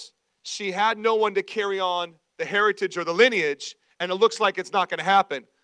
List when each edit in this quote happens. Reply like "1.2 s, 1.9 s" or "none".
none